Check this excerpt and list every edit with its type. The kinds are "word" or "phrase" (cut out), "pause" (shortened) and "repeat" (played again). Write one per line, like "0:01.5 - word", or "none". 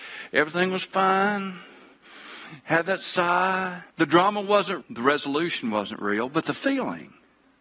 0:03.9 - pause
0:04.8 - word